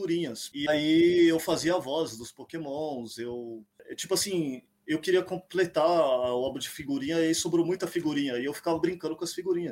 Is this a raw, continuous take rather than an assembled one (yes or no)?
yes